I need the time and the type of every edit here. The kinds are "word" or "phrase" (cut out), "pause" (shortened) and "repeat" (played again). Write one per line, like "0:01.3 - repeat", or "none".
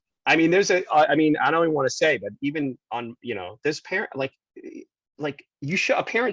none